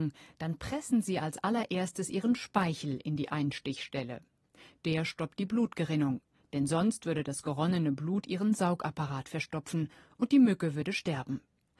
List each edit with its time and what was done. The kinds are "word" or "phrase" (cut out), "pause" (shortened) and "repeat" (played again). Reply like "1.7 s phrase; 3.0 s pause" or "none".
none